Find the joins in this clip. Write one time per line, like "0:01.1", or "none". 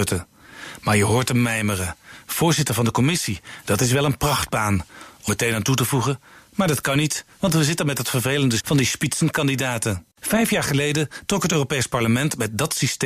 0:05.3
0:08.6
0:10.1